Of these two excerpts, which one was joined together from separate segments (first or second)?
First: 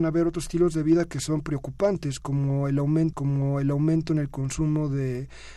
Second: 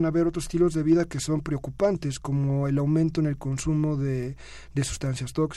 first